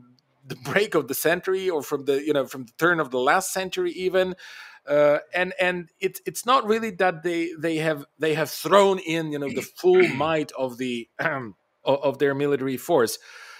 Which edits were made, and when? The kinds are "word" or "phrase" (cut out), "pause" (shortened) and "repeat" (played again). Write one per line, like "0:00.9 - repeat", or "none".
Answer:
0:11.8 - word